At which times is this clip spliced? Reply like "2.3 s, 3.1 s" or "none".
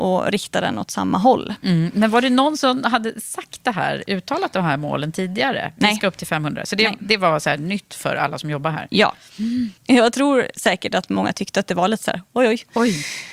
9.8 s